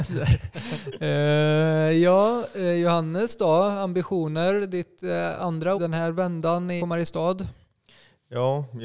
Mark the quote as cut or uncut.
cut